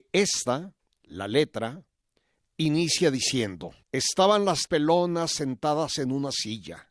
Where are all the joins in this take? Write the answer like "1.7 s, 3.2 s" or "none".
3.8 s, 4.7 s